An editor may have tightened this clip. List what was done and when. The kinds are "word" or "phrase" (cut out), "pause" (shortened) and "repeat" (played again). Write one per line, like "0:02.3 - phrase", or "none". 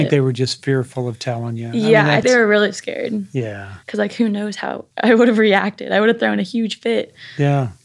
0:02.2 - word
0:03.8 - pause
0:04.9 - pause